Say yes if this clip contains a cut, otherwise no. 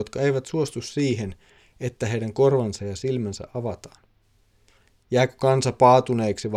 no